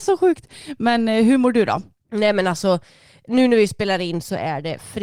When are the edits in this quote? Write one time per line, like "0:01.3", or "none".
0:03.3